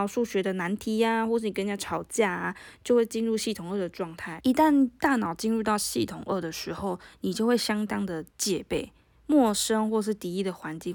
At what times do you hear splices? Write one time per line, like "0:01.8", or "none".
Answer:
none